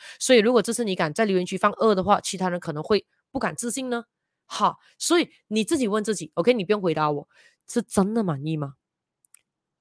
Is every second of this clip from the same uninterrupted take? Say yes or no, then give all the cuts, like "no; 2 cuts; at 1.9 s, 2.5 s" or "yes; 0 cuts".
yes; 0 cuts